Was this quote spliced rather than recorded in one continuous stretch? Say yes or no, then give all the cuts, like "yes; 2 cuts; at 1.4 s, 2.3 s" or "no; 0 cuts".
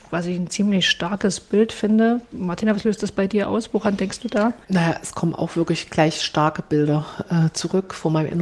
yes; 1 cut; at 4.6 s